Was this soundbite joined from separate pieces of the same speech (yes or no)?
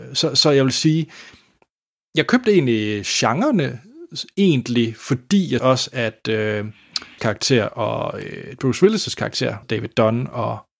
yes